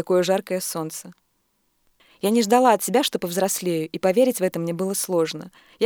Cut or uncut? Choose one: uncut